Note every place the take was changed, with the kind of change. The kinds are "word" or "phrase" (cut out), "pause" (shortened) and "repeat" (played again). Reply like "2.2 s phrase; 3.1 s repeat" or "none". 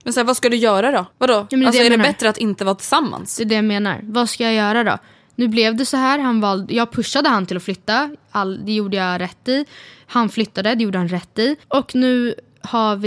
1.1 s pause; 11.6 s pause

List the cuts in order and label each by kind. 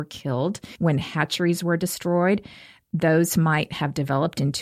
none

